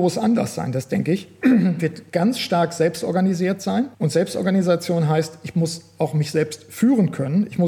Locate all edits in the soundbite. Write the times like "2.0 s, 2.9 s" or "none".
3.9 s